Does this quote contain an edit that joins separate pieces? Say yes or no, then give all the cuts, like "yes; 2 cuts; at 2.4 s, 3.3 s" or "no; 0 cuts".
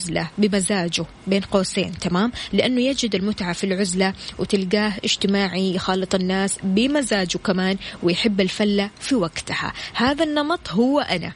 no; 0 cuts